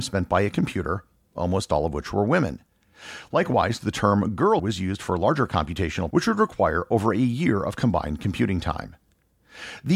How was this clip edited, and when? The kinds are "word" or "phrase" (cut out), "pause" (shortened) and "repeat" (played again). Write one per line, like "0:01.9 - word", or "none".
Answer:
0:04.6 - word
0:06.1 - word